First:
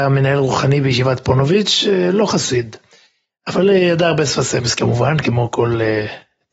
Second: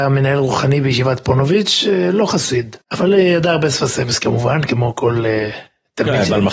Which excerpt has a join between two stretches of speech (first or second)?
second